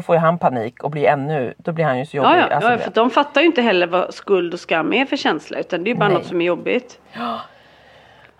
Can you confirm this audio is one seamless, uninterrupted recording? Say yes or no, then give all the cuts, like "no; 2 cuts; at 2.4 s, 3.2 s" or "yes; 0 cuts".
yes; 0 cuts